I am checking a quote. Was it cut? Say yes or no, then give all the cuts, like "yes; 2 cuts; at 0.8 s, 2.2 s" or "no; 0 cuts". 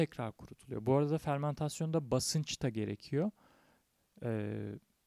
no; 0 cuts